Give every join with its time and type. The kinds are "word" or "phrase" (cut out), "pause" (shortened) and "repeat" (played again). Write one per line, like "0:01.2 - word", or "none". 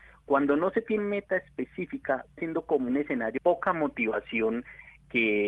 0:01.0 - word
0:02.4 - word
0:02.9 - word
0:03.4 - word